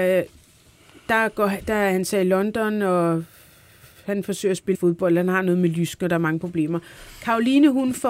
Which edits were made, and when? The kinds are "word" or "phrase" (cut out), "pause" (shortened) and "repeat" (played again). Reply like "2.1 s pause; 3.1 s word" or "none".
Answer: 4.7 s word